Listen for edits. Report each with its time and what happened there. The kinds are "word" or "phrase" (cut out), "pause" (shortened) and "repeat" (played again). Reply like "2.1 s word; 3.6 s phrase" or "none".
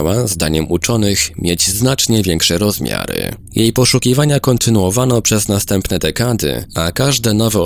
none